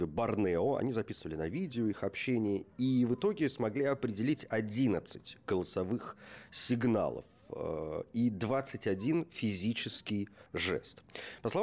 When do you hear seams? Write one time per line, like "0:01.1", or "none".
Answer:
0:10.5